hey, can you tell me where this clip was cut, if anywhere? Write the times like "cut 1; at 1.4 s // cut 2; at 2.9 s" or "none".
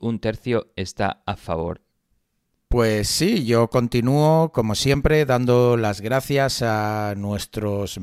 none

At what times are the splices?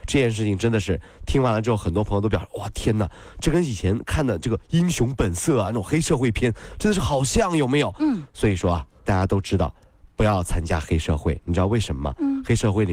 cut 1; at 9.1 s

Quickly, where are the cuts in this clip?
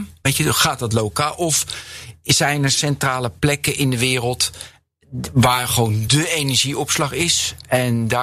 none

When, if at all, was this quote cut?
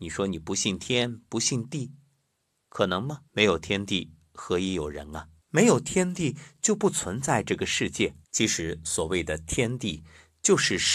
cut 1; at 3.3 s // cut 2; at 5.4 s // cut 3; at 8.2 s

